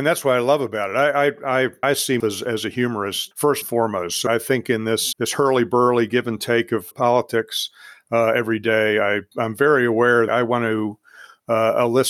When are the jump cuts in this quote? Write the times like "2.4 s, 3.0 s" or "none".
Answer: 1.8 s, 2.2 s, 3.3 s, 3.6 s, 4.3 s, 5.1 s, 6.9 s, 9.3 s, 10.3 s

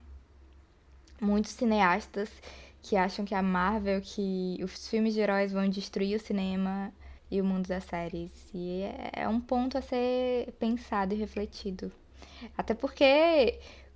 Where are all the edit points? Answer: 7.2 s

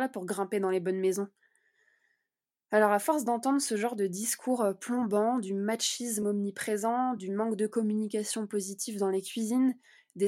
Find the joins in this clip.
none

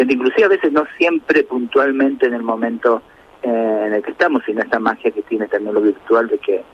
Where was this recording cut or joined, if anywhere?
none

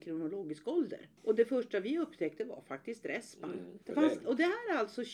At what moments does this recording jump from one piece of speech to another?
1.2 s, 3.8 s, 4.2 s

